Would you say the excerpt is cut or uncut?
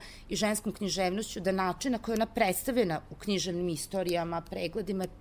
uncut